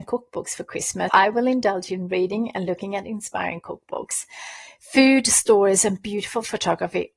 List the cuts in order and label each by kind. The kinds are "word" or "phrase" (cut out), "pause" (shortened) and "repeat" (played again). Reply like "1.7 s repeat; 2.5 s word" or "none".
1.1 s word